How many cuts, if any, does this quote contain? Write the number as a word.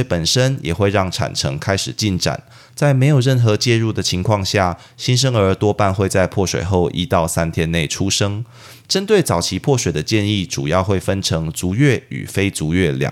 zero